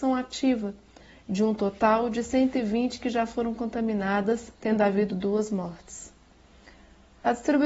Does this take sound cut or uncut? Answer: cut